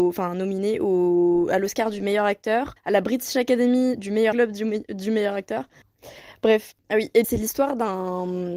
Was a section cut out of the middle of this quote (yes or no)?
yes